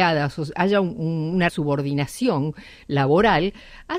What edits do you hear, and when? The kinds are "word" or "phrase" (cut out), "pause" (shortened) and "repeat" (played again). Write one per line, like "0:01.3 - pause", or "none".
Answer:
0:01.5 - phrase